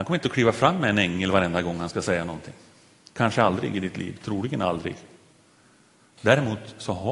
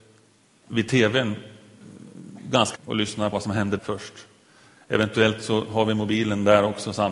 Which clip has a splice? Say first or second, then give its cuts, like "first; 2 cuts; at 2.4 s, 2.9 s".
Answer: second; 3 cuts; at 2.8 s, 3.3 s, 3.8 s